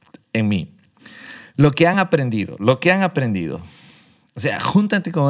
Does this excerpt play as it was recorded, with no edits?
yes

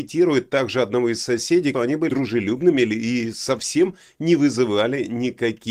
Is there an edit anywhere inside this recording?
yes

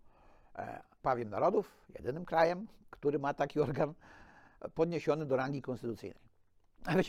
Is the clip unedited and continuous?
no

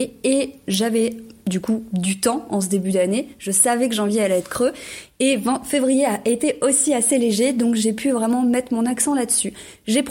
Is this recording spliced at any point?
no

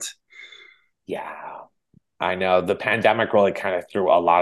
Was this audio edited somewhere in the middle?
no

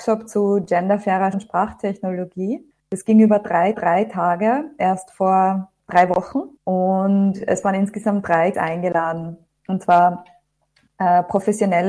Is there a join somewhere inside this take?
yes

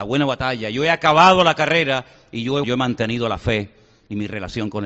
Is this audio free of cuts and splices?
no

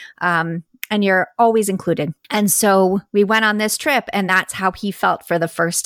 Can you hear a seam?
no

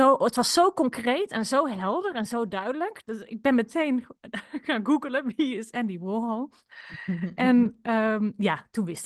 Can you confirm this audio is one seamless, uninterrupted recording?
yes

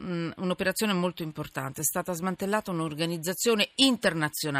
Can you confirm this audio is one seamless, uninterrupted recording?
yes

